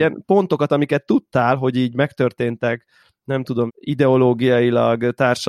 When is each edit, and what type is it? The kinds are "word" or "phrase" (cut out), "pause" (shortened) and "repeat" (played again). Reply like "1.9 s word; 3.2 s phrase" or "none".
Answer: 3.7 s word